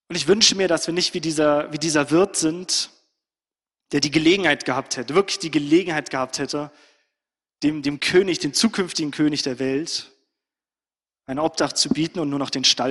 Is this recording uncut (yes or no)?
yes